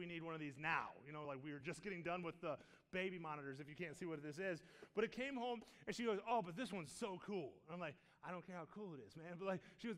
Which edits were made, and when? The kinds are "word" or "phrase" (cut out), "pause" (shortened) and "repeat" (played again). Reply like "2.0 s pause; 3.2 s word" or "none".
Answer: none